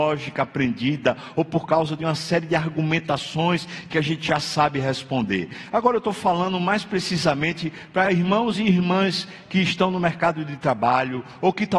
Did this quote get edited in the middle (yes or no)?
no